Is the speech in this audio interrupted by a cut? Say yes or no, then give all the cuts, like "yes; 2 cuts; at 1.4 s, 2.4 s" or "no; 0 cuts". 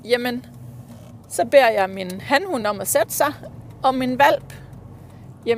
no; 0 cuts